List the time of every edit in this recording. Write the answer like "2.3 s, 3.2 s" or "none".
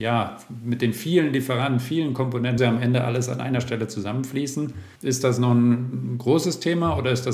2.6 s, 5.0 s